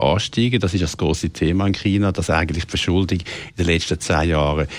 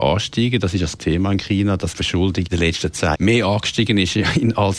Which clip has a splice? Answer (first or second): second